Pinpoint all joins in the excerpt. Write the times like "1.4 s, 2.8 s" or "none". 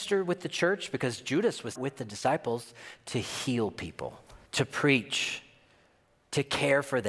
1.7 s, 4.5 s